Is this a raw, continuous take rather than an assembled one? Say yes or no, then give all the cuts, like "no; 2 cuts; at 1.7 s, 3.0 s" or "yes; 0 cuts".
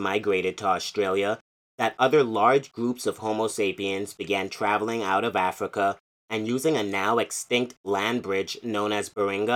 yes; 0 cuts